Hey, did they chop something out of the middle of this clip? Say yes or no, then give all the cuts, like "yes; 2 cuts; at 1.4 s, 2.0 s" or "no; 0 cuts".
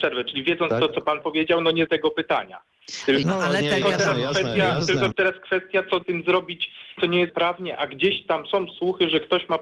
yes; 8 cuts; at 1.2 s, 1.9 s, 3.2 s, 3.8 s, 5.1 s, 6.0 s, 7.0 s, 7.3 s